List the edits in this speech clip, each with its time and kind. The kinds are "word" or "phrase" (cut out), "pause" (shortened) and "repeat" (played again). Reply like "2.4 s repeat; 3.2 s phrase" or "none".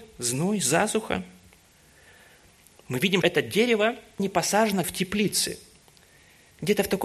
3.2 s word; 4.2 s word; 4.8 s word